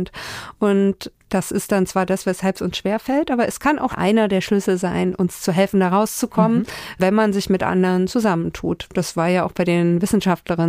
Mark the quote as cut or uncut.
cut